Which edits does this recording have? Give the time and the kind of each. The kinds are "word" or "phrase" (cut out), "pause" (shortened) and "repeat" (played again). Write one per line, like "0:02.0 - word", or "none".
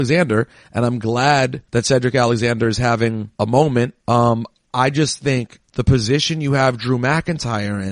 0:01.7 - pause
0:03.3 - pause
0:04.0 - pause
0:05.6 - pause